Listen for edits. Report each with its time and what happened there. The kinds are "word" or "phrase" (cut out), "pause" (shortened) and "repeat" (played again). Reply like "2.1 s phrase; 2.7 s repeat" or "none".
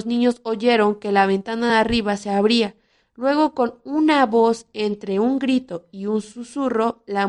none